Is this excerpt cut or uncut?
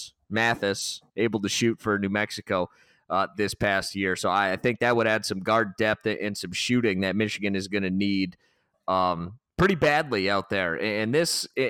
uncut